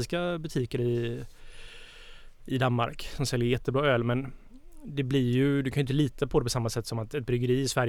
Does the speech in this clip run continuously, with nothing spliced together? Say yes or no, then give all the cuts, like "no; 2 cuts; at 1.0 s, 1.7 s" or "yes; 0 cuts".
yes; 0 cuts